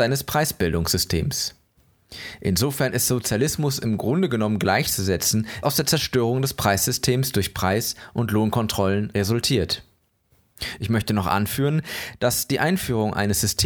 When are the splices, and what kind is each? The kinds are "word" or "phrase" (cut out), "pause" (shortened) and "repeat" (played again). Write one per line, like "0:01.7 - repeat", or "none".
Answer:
0:05.6 - phrase